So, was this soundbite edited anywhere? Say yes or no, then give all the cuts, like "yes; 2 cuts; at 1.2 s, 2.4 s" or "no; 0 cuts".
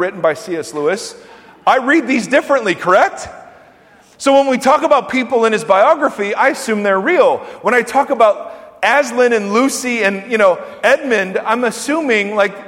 no; 0 cuts